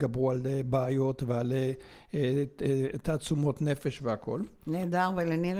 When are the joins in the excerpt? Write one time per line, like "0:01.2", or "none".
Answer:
none